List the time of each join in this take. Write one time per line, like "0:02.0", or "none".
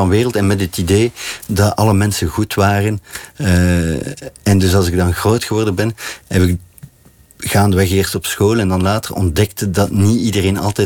none